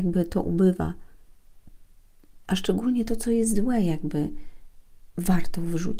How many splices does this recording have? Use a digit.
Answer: 0